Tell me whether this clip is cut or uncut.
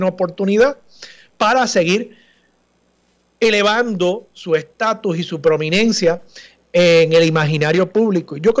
uncut